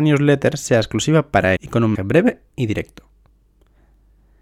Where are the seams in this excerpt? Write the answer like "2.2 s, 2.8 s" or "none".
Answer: 1.6 s, 1.9 s